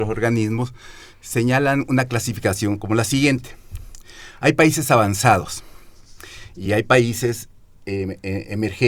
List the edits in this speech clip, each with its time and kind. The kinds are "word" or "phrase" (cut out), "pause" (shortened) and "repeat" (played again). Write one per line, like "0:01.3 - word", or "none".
none

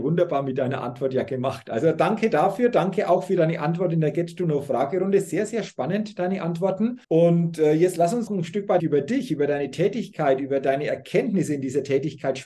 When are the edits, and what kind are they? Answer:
0:07.0 - pause
0:08.3 - word
0:08.8 - word

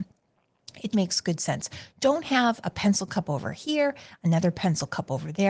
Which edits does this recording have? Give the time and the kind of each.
0:00.9 - word

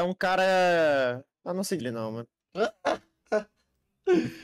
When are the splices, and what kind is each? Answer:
0:01.3 - pause
0:01.8 - word

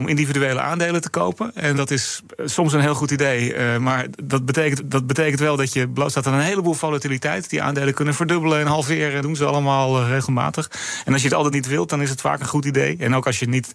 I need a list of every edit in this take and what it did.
0:01.7 - word
0:04.8 - repeat
0:09.2 - word
0:11.5 - word

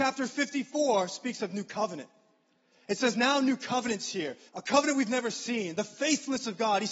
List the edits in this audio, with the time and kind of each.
0:04.5 - pause

